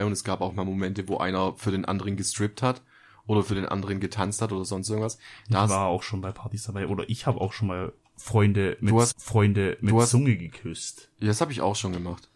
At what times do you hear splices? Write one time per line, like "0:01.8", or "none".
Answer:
0:09.1